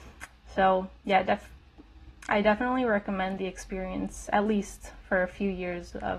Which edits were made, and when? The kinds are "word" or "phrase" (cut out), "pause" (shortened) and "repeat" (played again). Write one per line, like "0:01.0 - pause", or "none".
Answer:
0:01.0 - pause